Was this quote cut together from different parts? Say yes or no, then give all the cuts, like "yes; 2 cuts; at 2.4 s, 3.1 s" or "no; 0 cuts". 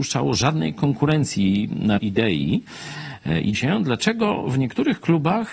yes; 2 cuts; at 2.0 s, 3.5 s